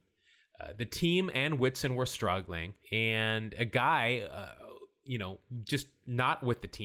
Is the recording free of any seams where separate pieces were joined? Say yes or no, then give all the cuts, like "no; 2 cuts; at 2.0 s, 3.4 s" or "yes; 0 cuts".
no; 1 cut; at 2.8 s